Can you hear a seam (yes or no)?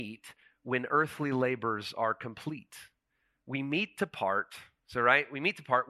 no